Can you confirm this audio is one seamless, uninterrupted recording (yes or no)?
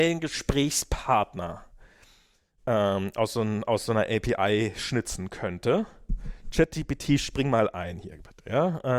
yes